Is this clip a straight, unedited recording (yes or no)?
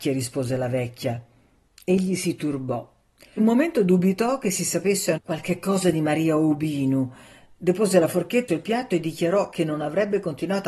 no